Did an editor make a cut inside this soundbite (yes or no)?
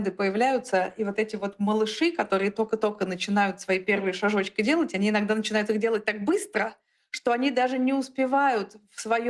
no